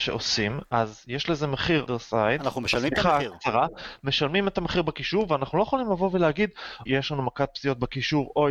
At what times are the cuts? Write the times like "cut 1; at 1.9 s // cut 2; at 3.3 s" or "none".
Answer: cut 1; at 1.9 s // cut 2; at 6.9 s